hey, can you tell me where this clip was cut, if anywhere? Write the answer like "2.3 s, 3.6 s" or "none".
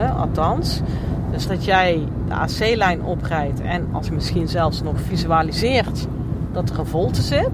1.4 s, 4.0 s